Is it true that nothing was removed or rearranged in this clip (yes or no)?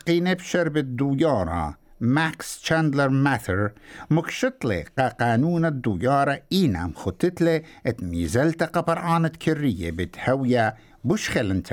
yes